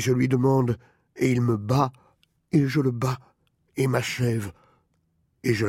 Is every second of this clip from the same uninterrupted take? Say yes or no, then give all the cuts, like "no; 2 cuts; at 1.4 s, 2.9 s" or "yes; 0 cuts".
yes; 0 cuts